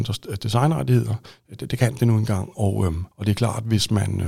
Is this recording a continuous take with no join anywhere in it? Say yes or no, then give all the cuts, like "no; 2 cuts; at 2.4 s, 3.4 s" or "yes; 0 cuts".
no; 1 cut; at 3.1 s